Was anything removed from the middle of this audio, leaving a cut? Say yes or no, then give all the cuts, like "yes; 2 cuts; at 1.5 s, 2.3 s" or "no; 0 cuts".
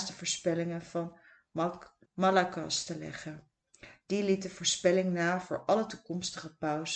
yes; 1 cut; at 2.1 s